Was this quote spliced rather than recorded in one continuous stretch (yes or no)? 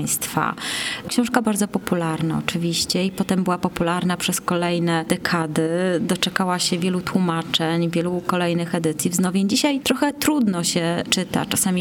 yes